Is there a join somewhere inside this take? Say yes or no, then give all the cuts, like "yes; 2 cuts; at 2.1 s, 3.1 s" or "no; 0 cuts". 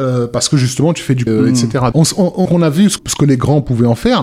yes; 4 cuts; at 1.3 s, 1.9 s, 2.5 s, 3.0 s